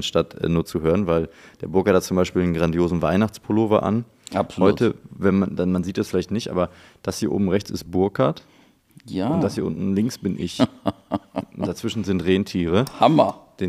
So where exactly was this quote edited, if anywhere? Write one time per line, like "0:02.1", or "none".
none